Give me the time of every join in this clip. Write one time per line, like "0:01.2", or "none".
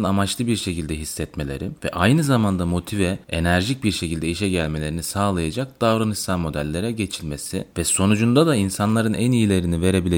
0:01.8
0:03.2